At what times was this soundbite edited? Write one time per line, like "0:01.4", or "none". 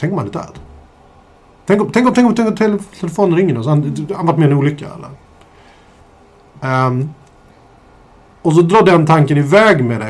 none